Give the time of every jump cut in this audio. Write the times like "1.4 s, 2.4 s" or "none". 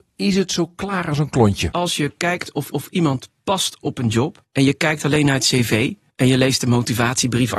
2.7 s

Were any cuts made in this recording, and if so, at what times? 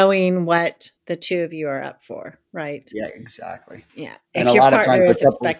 1.0 s, 3.9 s

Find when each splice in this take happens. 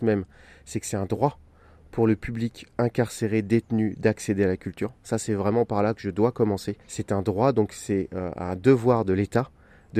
6.8 s

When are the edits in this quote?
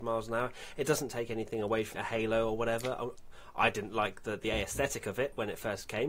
1.9 s

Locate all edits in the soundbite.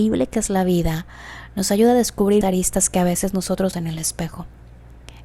2.4 s, 3.7 s

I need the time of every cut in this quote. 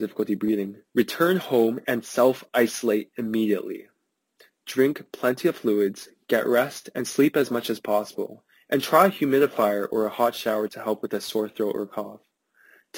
none

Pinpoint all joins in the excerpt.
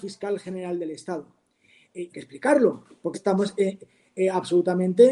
2.1 s, 3.1 s

